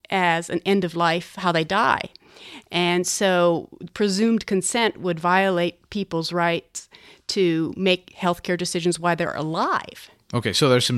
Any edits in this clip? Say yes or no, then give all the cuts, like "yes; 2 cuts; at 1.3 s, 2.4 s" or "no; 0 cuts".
no; 0 cuts